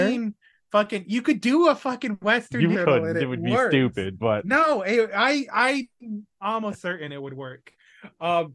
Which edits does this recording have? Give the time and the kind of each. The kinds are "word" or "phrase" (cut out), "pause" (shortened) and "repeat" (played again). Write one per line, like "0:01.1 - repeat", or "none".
0:02.7 - word

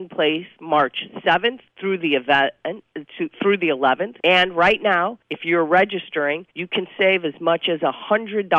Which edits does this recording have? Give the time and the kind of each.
0:01.7 - pause
0:04.2 - pause
0:05.2 - pause
0:06.5 - pause

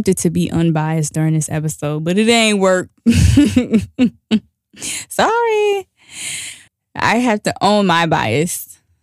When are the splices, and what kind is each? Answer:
0:06.7 - pause

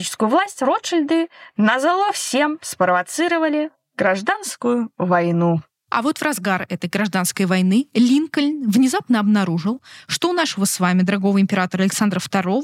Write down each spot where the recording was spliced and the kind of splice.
none

